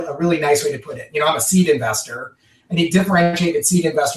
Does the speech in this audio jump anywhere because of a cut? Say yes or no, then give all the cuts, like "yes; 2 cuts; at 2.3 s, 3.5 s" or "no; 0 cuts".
no; 0 cuts